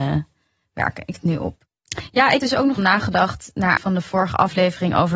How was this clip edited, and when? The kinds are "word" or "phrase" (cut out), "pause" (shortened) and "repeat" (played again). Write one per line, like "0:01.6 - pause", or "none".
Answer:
0:01.1 - word
0:02.4 - word
0:02.8 - word
0:03.8 - word